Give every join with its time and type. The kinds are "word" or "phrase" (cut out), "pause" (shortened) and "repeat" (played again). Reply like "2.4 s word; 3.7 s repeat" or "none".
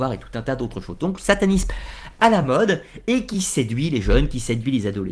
none